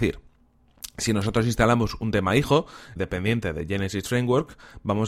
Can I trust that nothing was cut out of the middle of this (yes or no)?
no